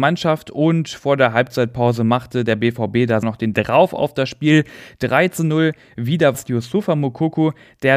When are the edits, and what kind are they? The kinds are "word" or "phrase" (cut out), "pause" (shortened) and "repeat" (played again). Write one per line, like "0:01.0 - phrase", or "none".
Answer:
0:03.2 - word
0:03.5 - word
0:06.3 - word

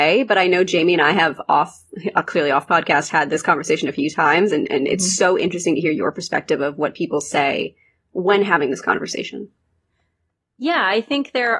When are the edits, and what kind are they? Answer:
none

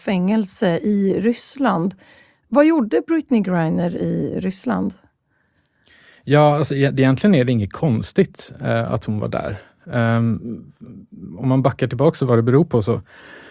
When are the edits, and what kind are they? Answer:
none

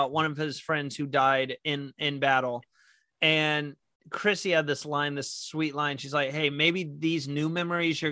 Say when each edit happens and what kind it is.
none

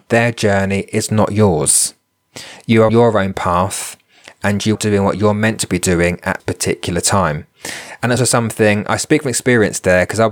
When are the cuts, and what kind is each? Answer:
0:02.9 - word
0:04.7 - word
0:06.4 - word
0:08.2 - word

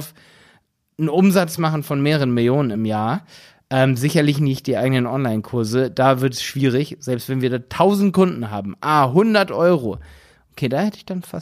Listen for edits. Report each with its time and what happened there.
none

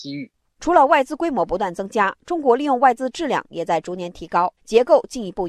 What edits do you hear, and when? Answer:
0:04.6 - pause

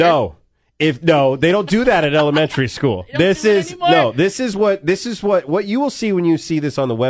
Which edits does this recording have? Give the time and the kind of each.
none

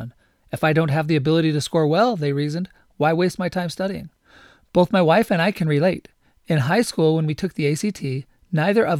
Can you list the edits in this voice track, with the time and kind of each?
none

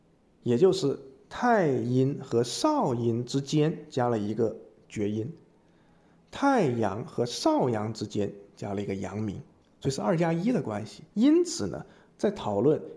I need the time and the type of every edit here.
0:11.1 - pause

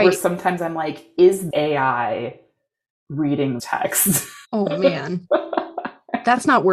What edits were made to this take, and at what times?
0:01.5 - word
0:03.6 - word
0:04.4 - pause

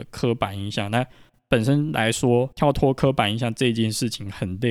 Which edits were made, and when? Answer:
0:02.5 - pause

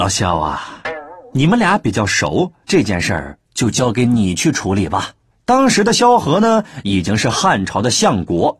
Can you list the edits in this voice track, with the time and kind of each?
0:02.6 - pause
0:03.4 - pause
0:05.3 - pause

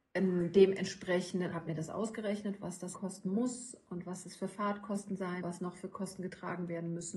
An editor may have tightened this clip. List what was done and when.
0:01.5 - word
0:02.9 - word
0:05.4 - word

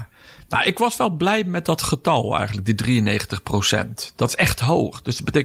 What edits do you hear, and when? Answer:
none

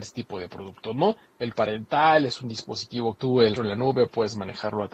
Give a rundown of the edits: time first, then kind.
0:01.5 - word
0:03.2 - phrase
0:03.6 - word

